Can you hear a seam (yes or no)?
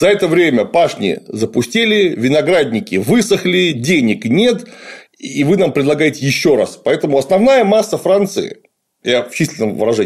no